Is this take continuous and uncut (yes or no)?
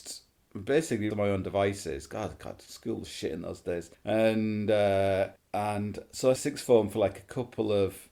no